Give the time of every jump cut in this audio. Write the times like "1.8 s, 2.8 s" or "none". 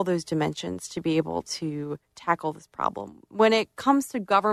none

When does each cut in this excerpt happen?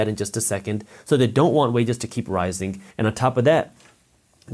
2.9 s

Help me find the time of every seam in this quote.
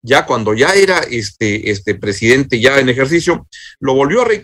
2.0 s

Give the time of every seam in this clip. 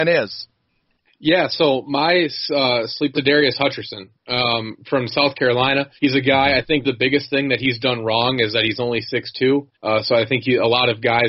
3.1 s, 6.0 s, 6.8 s, 9.7 s

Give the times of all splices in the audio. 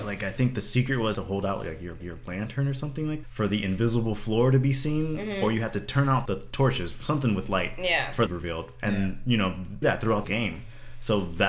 1.1 s, 2.0 s, 3.2 s, 6.2 s, 8.3 s, 9.8 s, 10.2 s

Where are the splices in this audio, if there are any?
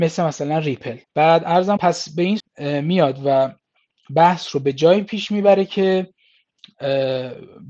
1.0 s, 1.8 s, 2.4 s

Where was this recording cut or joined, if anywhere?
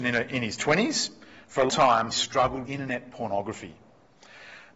1.7 s, 2.1 s, 2.7 s

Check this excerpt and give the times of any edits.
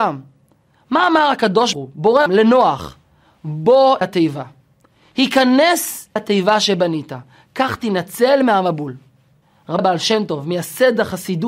1.7 s, 2.3 s, 4.0 s, 6.2 s, 9.8 s

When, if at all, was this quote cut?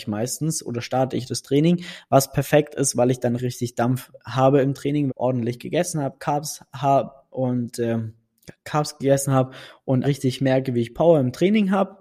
3.4 s, 5.1 s, 10.0 s

